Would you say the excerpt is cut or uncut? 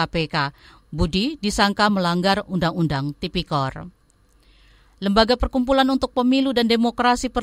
uncut